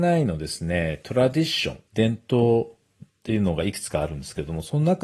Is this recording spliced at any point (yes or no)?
yes